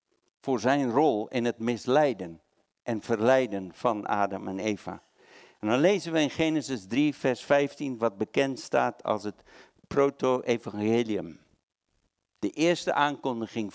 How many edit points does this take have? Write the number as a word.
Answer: zero